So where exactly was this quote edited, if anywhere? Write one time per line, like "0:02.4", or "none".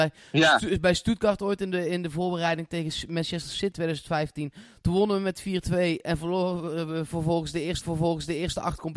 0:03.7
0:07.8